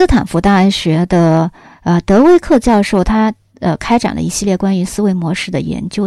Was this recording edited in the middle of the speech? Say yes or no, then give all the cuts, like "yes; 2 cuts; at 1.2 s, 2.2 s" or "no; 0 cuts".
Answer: no; 0 cuts